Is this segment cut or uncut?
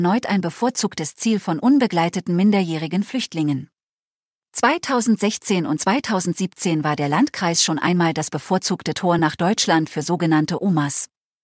uncut